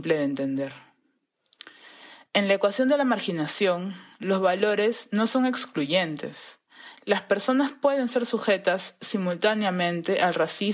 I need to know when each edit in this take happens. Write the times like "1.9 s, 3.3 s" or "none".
none

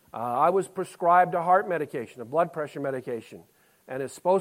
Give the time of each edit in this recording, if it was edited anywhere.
none

